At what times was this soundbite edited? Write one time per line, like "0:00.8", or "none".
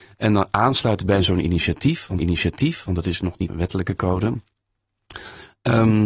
0:02.2
0:03.5